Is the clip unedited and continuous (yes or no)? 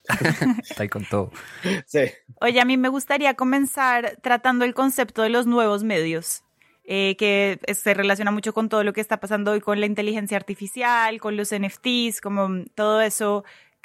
yes